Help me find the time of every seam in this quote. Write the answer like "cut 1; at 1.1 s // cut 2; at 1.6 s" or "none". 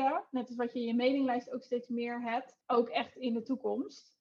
cut 1; at 2.6 s